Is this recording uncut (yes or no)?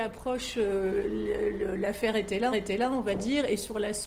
no